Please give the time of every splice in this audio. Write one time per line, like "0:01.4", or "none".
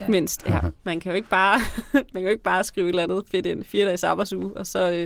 none